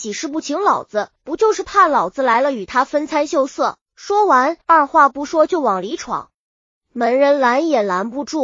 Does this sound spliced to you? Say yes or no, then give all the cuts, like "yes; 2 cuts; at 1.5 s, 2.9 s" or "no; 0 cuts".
yes; 3 cuts; at 1.2 s, 3.8 s, 4.6 s